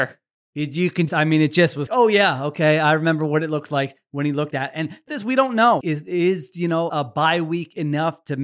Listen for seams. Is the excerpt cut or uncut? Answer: cut